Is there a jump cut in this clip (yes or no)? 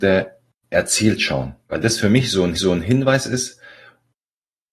yes